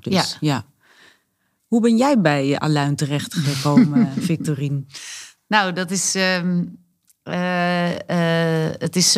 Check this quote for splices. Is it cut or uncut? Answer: uncut